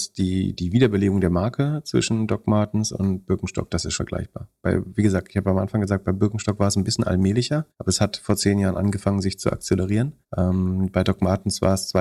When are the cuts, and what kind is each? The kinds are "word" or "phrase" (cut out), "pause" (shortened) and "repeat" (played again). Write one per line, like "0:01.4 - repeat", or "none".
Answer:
0:04.0 - word
0:07.7 - pause
0:10.2 - pause